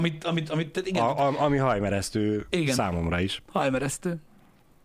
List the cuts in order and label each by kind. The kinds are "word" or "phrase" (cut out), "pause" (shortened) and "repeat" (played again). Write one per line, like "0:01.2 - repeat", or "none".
none